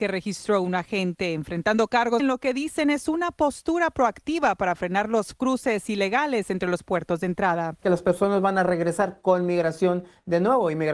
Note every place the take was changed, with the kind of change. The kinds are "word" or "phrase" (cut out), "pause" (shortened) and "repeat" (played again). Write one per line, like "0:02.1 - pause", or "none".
0:02.2 - phrase

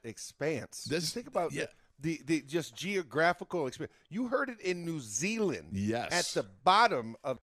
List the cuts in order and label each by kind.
none

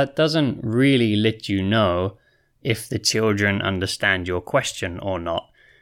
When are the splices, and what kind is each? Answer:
none

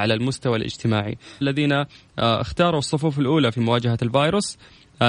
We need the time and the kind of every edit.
0:01.4 - word

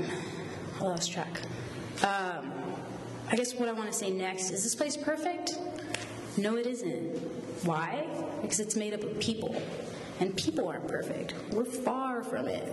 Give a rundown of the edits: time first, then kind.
0:04.5 - word

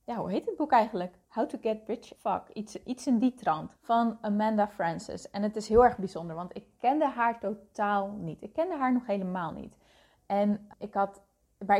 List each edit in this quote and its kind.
0:01.2 - pause
0:02.2 - word
0:03.8 - pause
0:10.7 - word

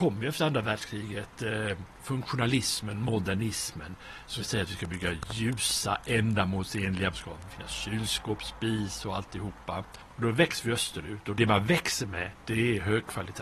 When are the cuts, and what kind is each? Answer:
0:04.4 - word
0:07.1 - phrase
0:07.5 - phrase
0:12.4 - pause

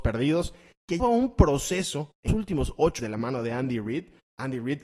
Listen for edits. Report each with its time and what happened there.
0:01.0 - word
0:02.3 - word
0:03.0 - word

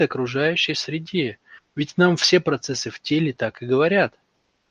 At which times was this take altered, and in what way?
none

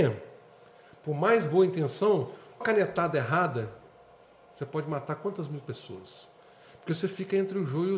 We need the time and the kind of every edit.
0:02.6 - word

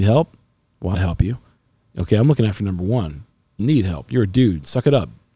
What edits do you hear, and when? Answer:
0:00.9 - phrase
0:03.6 - word

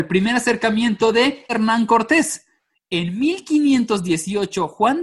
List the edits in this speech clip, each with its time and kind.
0:01.5 - word

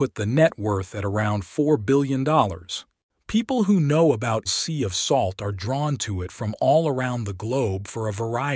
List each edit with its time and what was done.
0:04.5 - word

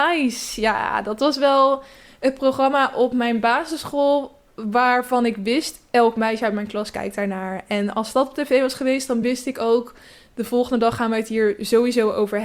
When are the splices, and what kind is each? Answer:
none

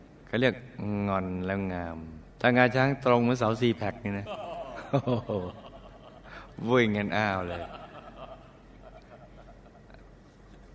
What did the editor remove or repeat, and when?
0:02.3 - pause

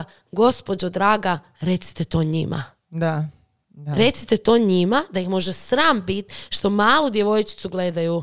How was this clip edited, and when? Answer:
none

